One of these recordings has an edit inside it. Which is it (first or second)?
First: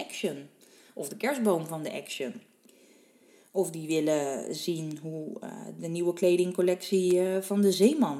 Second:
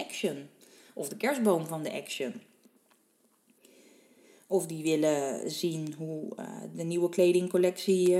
first